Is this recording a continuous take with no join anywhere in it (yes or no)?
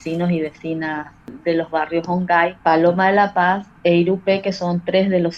no